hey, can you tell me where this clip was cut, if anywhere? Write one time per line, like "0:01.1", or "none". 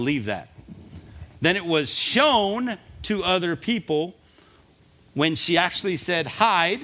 none